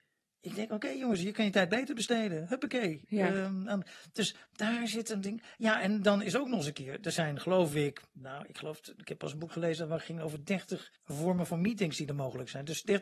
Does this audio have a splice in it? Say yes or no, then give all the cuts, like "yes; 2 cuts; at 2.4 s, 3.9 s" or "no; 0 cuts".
yes; 1 cut; at 11.0 s